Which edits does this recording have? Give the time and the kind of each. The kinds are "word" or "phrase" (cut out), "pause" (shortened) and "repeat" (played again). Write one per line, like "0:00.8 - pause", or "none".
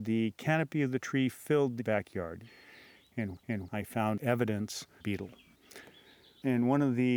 0:01.8 - word
0:03.4 - repeat
0:05.0 - phrase